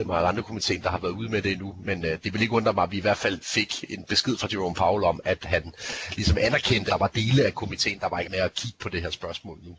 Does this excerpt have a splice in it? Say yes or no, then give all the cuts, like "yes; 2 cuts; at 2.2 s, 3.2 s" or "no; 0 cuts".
yes; 3 cuts; at 3.4 s, 6.9 s, 8.2 s